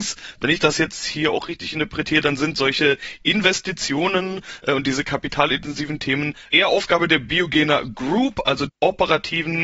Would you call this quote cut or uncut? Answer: cut